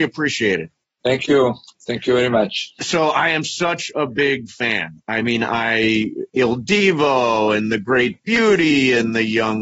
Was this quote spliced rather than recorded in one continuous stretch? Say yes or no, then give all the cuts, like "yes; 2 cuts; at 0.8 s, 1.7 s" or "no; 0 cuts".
no; 0 cuts